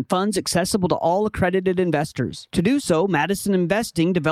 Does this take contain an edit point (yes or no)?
no